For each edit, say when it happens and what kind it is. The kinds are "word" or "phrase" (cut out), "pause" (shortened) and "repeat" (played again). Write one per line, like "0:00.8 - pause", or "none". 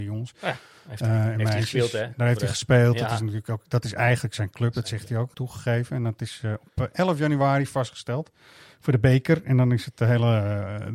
0:05.3 - phrase